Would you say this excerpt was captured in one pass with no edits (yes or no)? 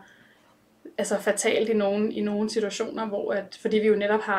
yes